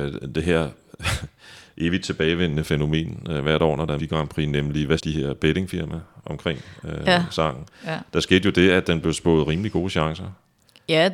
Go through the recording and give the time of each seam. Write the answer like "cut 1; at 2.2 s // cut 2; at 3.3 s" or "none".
cut 1; at 4.0 s // cut 2; at 5.0 s